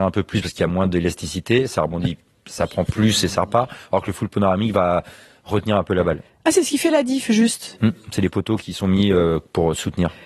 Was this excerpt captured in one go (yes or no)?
yes